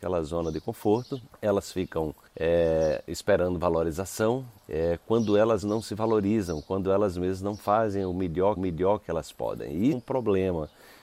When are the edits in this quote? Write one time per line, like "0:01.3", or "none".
0:01.3
0:02.3
0:04.6
0:05.6
0:08.6
0:09.9